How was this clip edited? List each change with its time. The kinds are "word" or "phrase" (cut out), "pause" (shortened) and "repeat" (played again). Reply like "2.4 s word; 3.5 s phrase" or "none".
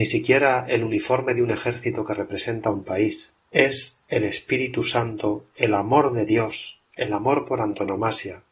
3.4 s pause